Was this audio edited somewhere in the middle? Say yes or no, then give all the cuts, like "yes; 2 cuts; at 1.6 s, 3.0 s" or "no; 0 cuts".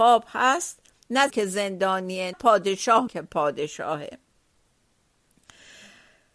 yes; 3 cuts; at 1.3 s, 2.3 s, 3.1 s